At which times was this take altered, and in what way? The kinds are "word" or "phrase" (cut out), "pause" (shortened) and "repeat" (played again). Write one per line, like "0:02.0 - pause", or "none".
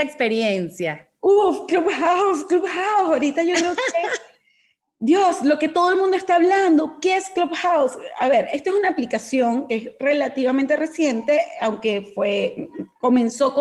none